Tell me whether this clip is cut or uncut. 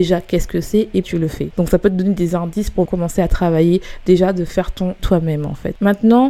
cut